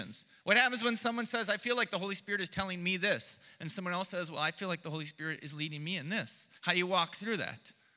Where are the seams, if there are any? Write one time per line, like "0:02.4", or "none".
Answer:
0:06.6

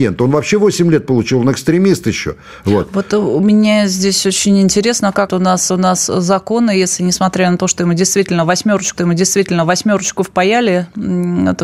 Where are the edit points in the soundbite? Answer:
0:05.3
0:05.7
0:08.9

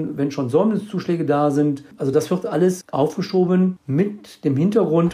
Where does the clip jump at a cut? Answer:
none

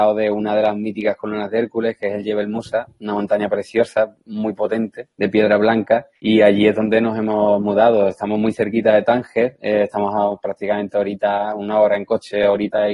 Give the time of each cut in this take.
0:05.1
0:06.1

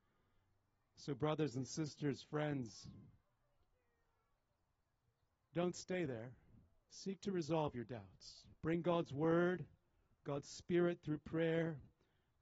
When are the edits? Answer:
0:08.5

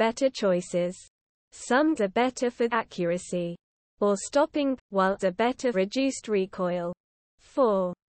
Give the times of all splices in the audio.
0:02.0
0:02.7
0:04.8
0:05.2
0:05.7

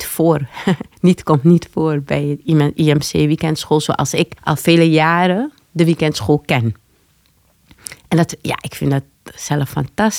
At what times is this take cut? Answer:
0:04.4

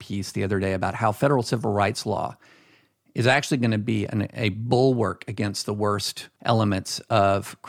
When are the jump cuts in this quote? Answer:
0:06.4

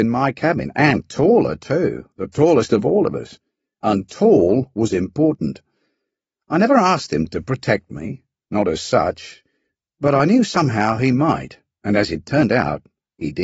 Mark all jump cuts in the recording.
none

